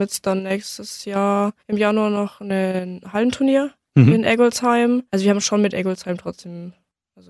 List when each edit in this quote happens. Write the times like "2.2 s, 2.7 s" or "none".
1.6 s, 5.1 s